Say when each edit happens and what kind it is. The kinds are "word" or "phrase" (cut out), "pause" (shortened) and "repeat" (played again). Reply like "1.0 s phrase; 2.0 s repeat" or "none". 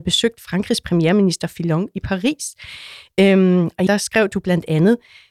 3.9 s word

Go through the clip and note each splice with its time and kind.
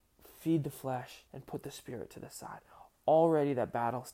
1.3 s pause

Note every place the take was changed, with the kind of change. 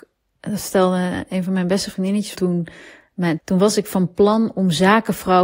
2.3 s word; 3.4 s phrase

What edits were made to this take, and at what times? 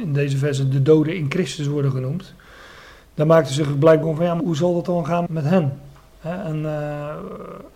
4.0 s word; 4.4 s word; 5.3 s word

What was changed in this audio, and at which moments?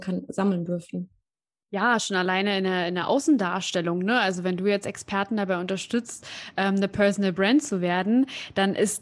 none

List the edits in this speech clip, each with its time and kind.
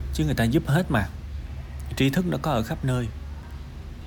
none

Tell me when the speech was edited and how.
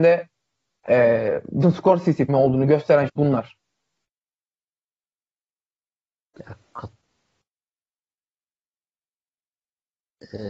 1.6 s word; 2.3 s word; 3.1 s word

